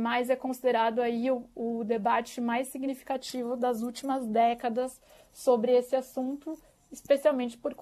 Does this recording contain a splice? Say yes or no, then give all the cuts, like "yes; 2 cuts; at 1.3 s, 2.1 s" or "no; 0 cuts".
no; 0 cuts